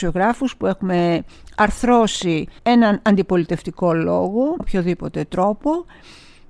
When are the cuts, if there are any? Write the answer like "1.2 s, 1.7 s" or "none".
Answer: 2.6 s, 4.6 s